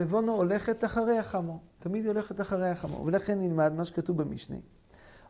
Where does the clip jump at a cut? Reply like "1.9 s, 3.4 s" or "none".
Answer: none